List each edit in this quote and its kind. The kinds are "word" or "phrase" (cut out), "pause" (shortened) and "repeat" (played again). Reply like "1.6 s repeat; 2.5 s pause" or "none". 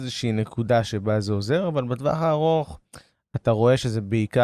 none